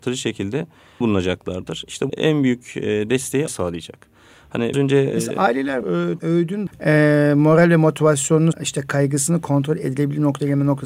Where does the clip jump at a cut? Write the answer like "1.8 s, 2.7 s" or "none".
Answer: 1.0 s, 2.1 s, 3.5 s, 4.7 s, 5.1 s, 5.8 s, 6.2 s, 6.7 s, 8.5 s